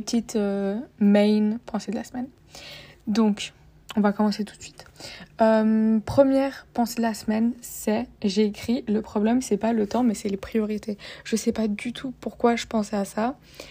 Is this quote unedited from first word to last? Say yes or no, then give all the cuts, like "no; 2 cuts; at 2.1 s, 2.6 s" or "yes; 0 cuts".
yes; 0 cuts